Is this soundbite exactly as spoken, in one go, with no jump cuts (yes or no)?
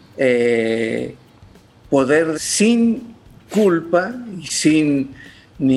no